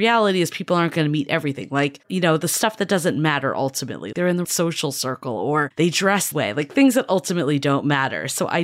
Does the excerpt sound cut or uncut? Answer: cut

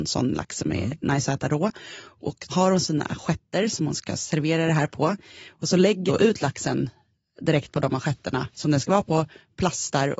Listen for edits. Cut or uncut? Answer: cut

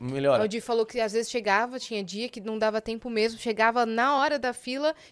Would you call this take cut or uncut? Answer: uncut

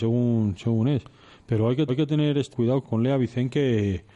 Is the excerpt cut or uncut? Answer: cut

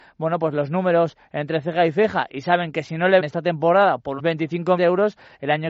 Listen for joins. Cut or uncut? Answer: cut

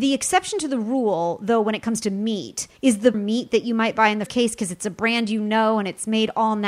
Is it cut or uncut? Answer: cut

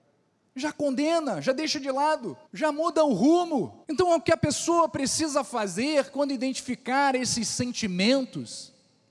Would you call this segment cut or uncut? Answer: cut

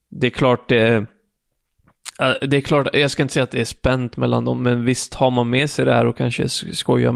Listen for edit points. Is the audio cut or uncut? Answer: uncut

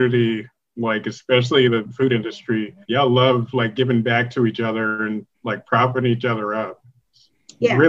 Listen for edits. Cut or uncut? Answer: cut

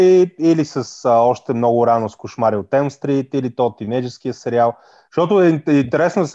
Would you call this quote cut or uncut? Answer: uncut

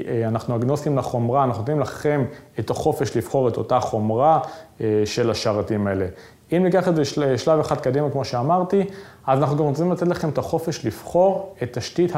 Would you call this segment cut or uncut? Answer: uncut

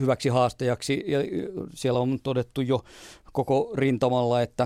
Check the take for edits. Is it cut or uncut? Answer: uncut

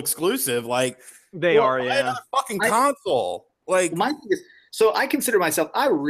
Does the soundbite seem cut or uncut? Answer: uncut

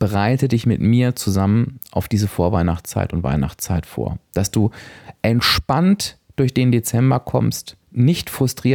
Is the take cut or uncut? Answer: cut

